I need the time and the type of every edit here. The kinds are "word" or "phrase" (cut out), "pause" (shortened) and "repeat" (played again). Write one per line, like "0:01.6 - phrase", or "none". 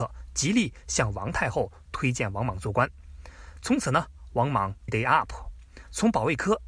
0:04.9 - word